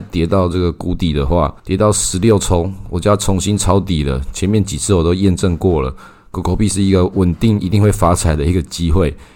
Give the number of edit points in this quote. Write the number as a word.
one